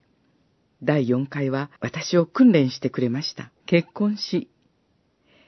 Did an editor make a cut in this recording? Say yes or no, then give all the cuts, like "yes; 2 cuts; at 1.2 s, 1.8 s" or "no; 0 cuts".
yes; 2 cuts; at 1.8 s, 3.6 s